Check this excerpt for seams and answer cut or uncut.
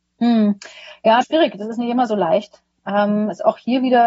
cut